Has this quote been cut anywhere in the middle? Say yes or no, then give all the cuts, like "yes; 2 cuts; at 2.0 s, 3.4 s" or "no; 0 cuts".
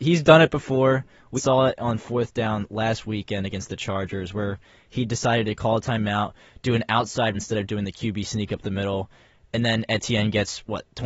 yes; 2 cuts; at 1.4 s, 7.3 s